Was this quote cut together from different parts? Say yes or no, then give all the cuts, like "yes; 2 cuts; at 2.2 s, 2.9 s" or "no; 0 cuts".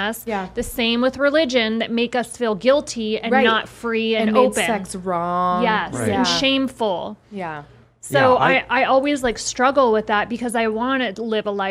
no; 0 cuts